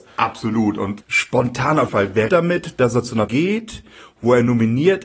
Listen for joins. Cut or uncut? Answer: cut